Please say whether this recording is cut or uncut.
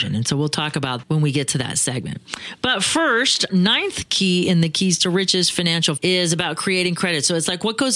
cut